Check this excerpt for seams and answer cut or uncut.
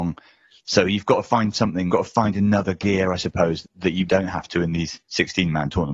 cut